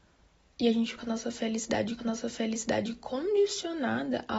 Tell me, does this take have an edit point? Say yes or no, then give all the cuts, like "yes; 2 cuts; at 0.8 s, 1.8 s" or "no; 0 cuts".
yes; 2 cuts; at 1.0 s, 2.0 s